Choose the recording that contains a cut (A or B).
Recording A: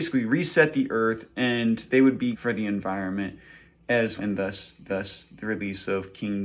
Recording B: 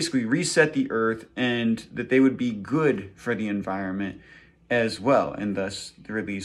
A